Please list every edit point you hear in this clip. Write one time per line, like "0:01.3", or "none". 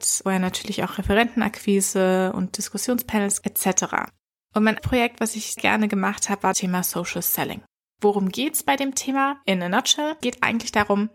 0:03.4
0:04.8
0:05.6
0:06.5
0:10.2